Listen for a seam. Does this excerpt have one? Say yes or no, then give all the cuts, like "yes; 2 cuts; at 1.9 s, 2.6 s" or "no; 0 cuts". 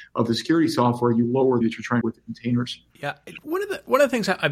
yes; 3 cuts; at 1.2 s, 1.6 s, 2.0 s